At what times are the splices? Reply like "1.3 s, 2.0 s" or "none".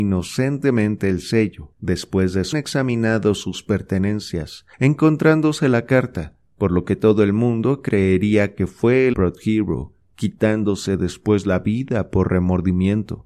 1.7 s, 2.5 s, 4.7 s, 6.5 s, 9.1 s